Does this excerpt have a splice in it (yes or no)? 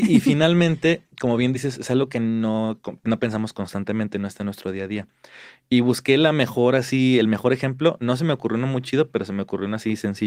no